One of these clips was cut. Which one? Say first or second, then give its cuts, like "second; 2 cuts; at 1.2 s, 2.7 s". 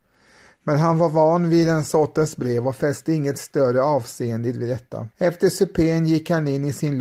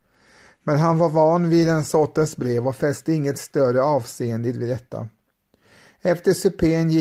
first; 1 cut; at 5.1 s